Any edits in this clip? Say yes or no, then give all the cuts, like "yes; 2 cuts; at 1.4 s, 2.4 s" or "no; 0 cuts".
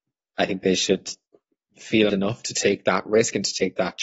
yes; 1 cut; at 2.1 s